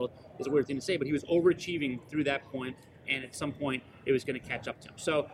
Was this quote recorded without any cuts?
yes; 0 cuts

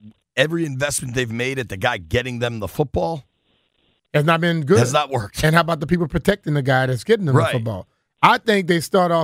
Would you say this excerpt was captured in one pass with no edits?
yes; 0 cuts

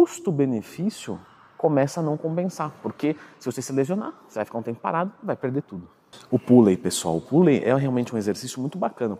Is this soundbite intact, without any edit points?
yes; 0 cuts

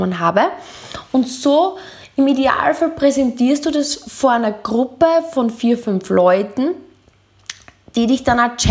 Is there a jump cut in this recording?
no; 0 cuts

